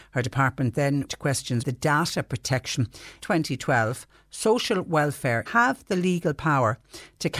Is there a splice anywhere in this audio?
yes; 4 cuts; at 1.1 s, 1.6 s, 3.2 s, 5.5 s

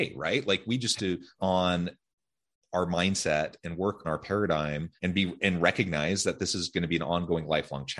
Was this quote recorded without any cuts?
no; 4 cuts; at 1.0 s, 1.4 s, 4.0 s, 5.0 s

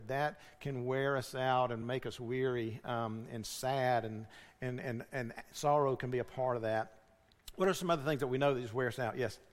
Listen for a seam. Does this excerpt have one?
no; 0 cuts

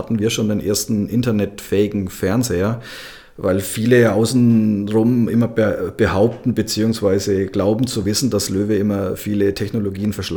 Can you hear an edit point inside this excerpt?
no; 0 cuts

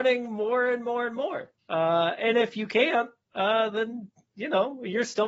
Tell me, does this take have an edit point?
no; 0 cuts

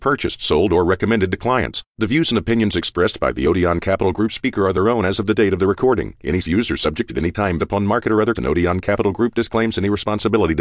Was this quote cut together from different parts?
yes; 4 cuts; at 6.4 s, 7.1 s, 7.6 s, 8.3 s

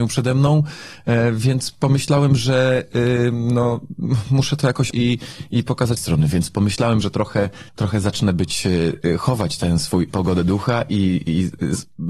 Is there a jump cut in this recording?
yes; 4 cuts; at 4.9 s, 6.0 s, 7.7 s, 10.1 s

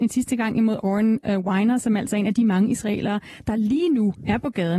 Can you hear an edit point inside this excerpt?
no; 0 cuts

